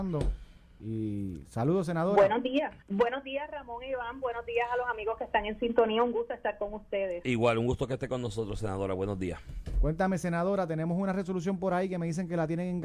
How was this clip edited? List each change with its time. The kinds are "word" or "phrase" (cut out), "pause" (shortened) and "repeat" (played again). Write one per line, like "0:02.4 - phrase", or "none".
0:02.8 - pause